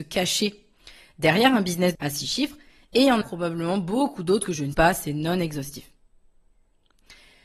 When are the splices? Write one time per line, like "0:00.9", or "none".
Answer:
0:01.9
0:03.2
0:04.7

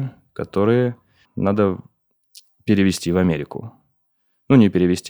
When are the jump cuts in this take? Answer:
0:01.2

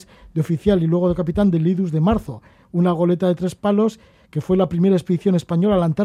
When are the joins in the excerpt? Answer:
none

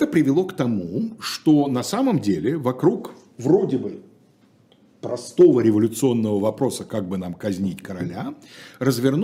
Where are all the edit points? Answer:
none

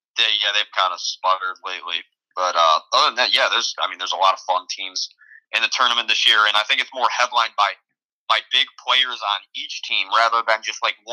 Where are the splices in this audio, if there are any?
none

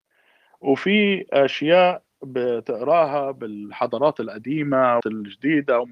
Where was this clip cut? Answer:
0:05.0

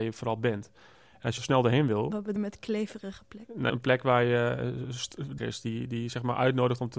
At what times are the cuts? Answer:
0:01.4
0:02.4
0:03.7
0:05.4

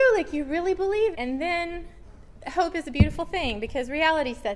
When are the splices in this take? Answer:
0:01.1

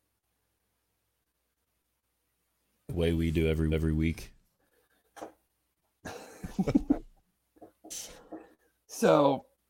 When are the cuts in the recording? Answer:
0:03.7

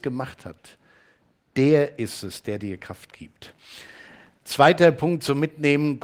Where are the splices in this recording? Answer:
none

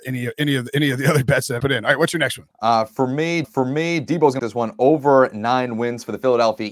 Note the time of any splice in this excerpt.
0:01.6
0:02.5
0:03.4
0:04.4

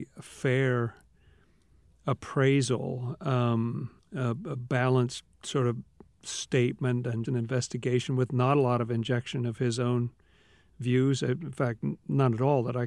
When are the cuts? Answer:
0:04.0
0:07.2

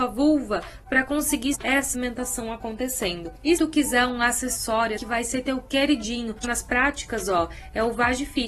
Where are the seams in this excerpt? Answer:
0:01.5
0:01.9
0:03.6
0:05.0
0:06.4

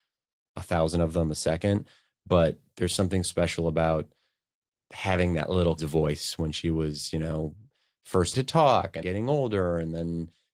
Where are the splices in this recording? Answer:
0:03.2
0:05.8
0:08.3
0:09.0

